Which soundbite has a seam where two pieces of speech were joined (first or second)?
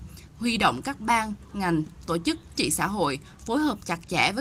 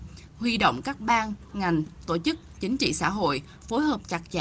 first